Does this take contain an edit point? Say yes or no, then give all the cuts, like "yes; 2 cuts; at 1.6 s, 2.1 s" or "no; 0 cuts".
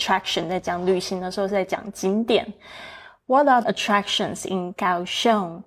yes; 1 cut; at 3.6 s